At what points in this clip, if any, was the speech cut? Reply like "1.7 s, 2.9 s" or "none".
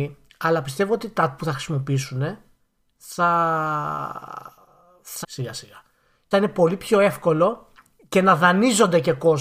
1.4 s, 5.2 s, 6.3 s